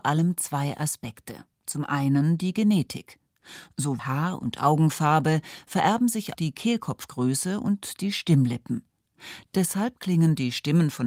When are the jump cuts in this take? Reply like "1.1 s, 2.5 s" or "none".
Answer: 1.5 s, 4.0 s, 6.3 s